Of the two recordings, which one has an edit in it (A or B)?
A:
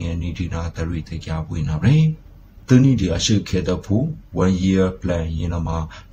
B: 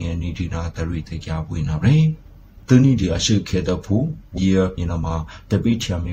B